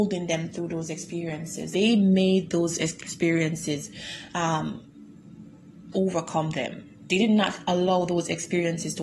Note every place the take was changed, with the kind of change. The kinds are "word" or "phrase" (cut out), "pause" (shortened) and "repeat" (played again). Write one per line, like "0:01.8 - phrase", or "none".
0:01.7 - word
0:05.9 - word